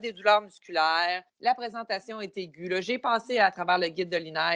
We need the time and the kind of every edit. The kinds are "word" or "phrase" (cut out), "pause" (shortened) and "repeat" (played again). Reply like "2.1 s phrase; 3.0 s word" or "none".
1.3 s pause